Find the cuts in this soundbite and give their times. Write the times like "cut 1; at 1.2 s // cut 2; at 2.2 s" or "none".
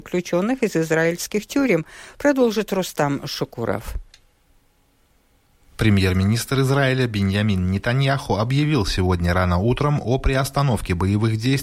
none